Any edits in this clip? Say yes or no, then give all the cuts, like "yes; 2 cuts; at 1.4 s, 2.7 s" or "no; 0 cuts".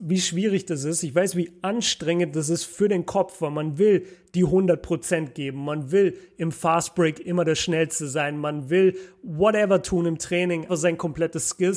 yes; 1 cut; at 10.7 s